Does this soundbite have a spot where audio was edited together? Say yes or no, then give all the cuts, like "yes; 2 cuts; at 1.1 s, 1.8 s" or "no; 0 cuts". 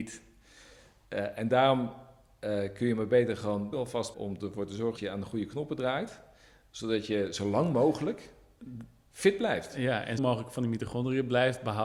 yes; 4 cuts; at 3.7 s, 4.1 s, 5.0 s, 10.2 s